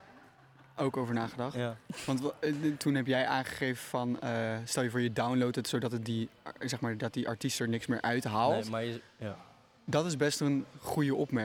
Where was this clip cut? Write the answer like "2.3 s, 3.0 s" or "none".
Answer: none